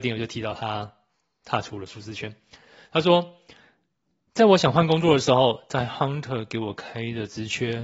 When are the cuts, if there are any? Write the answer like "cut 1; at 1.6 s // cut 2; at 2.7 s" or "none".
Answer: none